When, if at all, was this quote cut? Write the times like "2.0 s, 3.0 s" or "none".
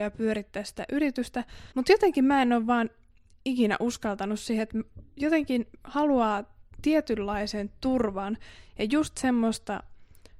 1.7 s